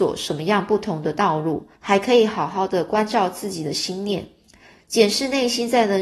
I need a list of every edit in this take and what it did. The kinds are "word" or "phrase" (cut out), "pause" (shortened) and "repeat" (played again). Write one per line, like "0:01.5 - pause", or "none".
0:01.8 - pause